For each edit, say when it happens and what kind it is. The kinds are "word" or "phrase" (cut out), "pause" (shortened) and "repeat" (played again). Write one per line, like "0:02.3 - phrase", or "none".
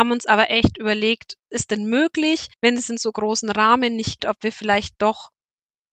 0:01.5 - word
0:02.5 - pause
0:04.2 - word